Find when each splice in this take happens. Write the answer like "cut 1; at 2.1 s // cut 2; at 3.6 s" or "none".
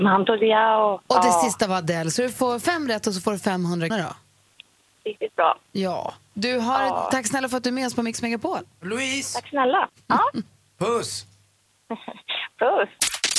cut 1; at 3.9 s